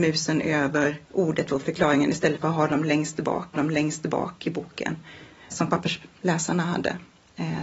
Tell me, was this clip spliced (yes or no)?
yes